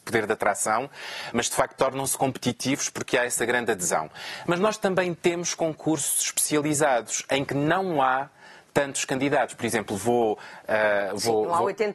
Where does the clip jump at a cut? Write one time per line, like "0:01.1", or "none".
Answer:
none